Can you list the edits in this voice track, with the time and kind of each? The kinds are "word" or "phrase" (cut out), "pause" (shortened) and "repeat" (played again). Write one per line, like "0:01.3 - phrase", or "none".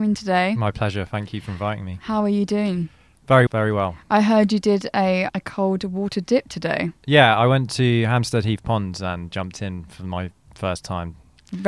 0:03.5 - word
0:05.3 - word